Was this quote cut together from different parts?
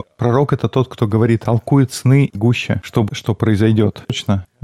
yes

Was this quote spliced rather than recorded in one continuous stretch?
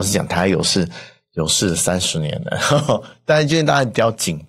no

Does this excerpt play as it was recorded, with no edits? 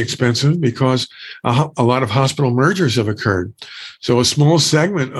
yes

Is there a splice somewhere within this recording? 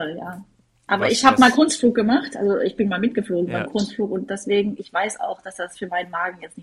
no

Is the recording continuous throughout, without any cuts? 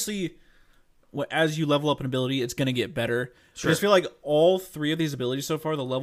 yes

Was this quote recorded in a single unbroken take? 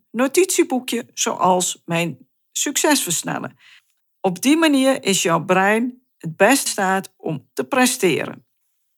no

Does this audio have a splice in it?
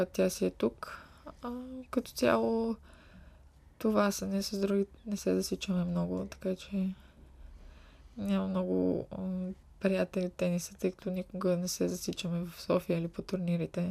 yes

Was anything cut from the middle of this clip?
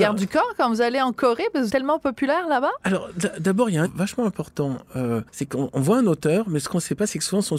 yes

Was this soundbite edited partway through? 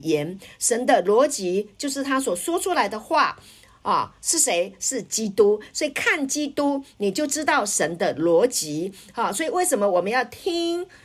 no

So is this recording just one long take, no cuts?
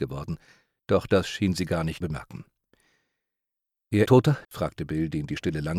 no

